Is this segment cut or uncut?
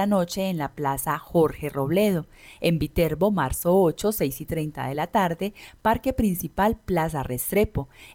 uncut